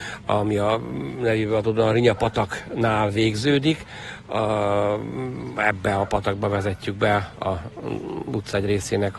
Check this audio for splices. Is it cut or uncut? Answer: uncut